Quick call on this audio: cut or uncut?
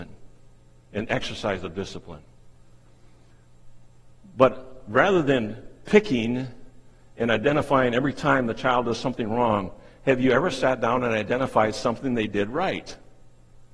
uncut